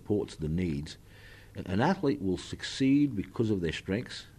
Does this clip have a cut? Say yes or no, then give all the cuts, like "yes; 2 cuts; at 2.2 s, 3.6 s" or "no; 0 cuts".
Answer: no; 0 cuts